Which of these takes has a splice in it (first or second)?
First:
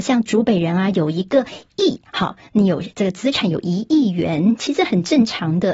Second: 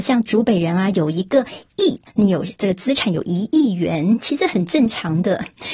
second